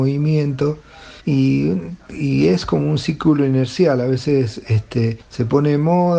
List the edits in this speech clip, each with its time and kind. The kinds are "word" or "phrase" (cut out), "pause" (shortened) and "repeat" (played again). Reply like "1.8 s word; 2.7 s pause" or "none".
1.2 s pause; 5.2 s pause